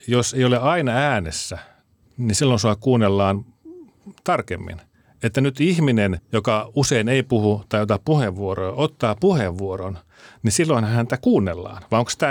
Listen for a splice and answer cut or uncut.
cut